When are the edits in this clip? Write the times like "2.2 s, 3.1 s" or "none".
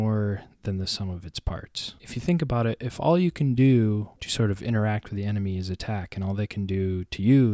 2.0 s